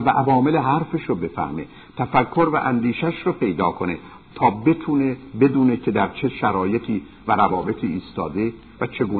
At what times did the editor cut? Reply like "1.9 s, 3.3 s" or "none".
none